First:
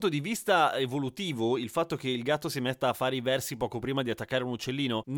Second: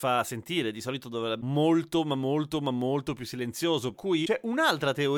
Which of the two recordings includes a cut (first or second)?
second